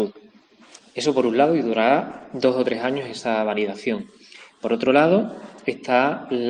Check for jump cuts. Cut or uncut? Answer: uncut